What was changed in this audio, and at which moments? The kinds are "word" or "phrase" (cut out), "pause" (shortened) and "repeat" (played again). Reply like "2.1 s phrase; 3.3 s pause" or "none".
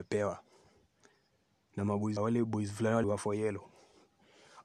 2.2 s word; 3.0 s word